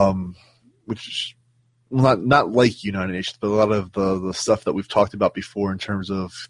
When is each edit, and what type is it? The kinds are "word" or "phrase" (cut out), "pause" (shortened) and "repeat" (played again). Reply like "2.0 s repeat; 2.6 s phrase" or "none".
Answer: none